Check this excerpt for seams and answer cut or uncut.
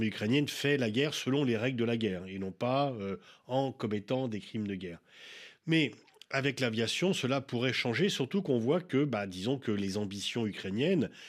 uncut